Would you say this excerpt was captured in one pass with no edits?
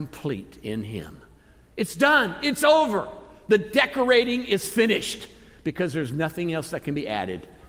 yes; 0 cuts

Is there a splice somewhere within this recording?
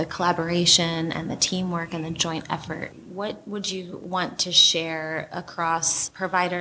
no; 0 cuts

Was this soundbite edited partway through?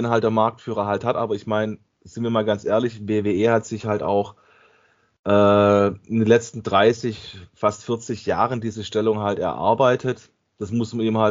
no; 0 cuts

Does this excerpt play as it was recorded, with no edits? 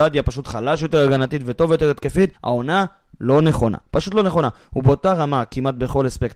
no; 1 cut; at 2.4 s

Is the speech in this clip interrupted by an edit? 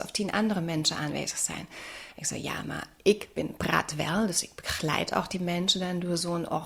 no; 0 cuts

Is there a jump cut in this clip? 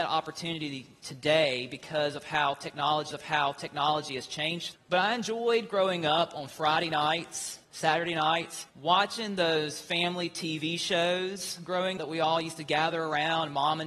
yes; 5 cuts; at 3.1 s, 4.7 s, 7.6 s, 8.7 s, 12.0 s

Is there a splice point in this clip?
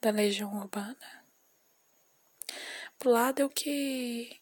yes; 2 cuts; at 3.0 s, 3.5 s

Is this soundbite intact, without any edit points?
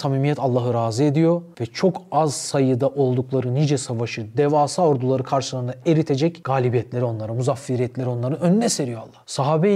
yes; 0 cuts

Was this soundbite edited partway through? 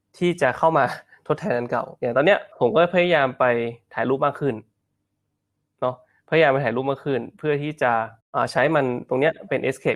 yes; 1 cut; at 2.5 s

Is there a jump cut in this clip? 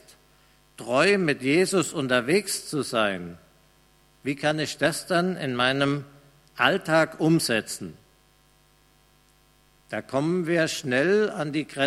no; 0 cuts

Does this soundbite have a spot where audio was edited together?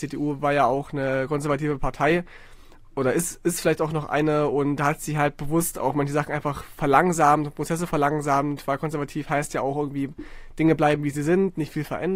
no; 0 cuts

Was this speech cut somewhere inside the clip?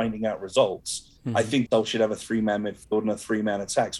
yes; 2 cuts; at 1.2 s, 1.7 s

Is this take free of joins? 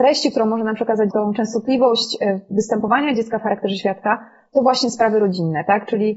no; 1 cut; at 1.1 s

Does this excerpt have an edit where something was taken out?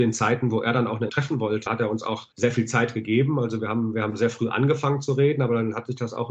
yes; 3 cuts; at 1.1 s, 1.7 s, 2.3 s

